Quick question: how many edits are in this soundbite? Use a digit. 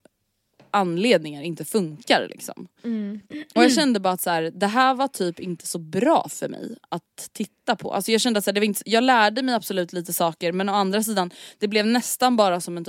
1